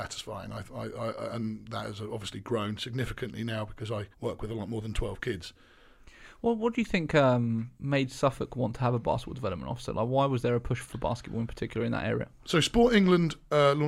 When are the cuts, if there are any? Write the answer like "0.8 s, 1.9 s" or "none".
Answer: 1.3 s, 4.1 s, 7.7 s, 10.8 s